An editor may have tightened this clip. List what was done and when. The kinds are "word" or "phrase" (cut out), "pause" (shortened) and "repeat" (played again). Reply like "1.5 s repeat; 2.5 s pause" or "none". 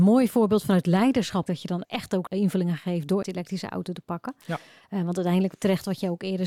1.5 s word; 1.8 s word; 2.3 s word; 3.2 s word

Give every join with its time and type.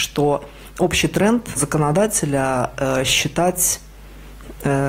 1.6 s word

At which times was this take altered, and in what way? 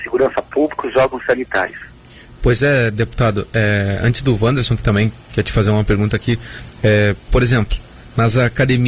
none

